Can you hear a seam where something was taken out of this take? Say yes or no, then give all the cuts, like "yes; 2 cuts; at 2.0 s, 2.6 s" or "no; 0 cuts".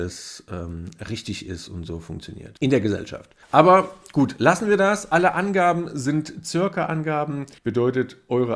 yes; 2 cuts; at 3.4 s, 7.6 s